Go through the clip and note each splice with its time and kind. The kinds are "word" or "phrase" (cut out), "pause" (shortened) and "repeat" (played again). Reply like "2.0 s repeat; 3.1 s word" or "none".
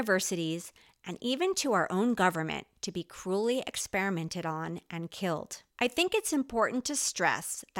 5.7 s pause